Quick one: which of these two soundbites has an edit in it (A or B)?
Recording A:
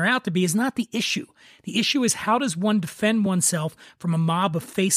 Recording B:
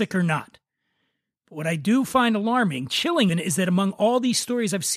B